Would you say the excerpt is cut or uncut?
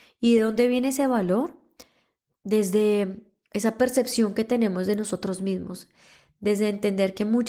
uncut